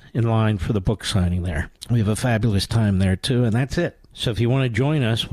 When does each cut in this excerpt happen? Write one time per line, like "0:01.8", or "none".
0:01.8
0:04.1